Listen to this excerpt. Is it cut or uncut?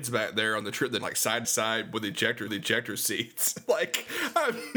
cut